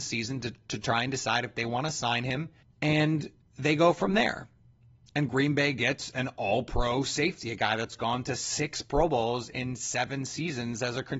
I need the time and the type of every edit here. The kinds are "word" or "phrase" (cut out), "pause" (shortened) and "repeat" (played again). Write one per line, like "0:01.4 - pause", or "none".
none